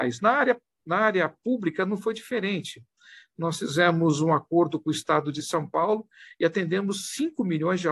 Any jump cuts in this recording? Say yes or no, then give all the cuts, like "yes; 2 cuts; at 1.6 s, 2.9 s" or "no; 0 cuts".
no; 0 cuts